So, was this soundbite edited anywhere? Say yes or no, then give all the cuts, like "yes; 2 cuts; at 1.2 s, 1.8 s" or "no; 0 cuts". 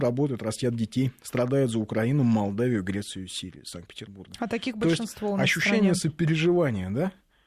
no; 0 cuts